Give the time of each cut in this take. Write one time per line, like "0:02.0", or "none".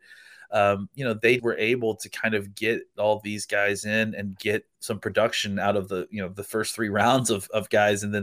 0:01.4